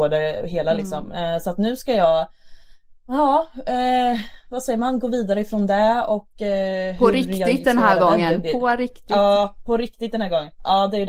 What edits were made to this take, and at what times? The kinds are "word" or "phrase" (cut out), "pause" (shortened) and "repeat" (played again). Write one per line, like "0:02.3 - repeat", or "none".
none